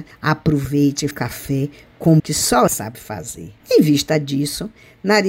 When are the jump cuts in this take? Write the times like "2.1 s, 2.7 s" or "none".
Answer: 1.1 s, 2.2 s, 2.7 s, 3.6 s